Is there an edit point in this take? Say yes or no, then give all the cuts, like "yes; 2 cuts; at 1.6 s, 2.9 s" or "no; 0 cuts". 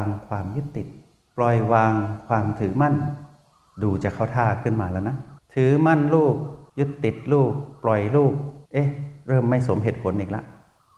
yes; 3 cuts; at 5.4 s, 6.7 s, 8.7 s